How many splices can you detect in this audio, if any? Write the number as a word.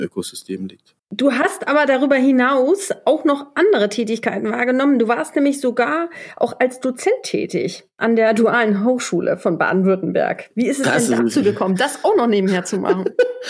one